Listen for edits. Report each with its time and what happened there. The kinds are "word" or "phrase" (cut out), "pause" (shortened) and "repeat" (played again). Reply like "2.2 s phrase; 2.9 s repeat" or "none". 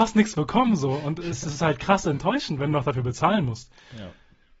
none